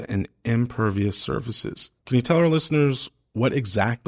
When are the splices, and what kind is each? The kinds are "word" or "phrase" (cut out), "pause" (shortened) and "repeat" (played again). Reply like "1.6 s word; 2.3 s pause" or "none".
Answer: 2.0 s pause